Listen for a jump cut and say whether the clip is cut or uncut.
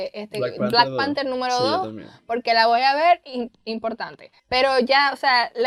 cut